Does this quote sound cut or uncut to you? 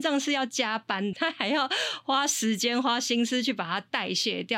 cut